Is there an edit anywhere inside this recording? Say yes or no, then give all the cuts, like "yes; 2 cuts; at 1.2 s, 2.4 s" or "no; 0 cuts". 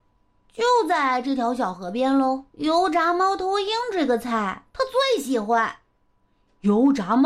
yes; 2 cuts; at 2.5 s, 4.7 s